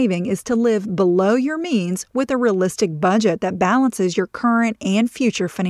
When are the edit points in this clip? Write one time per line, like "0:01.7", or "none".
none